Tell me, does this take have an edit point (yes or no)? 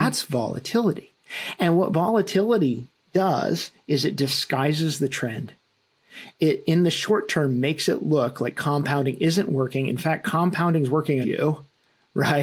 yes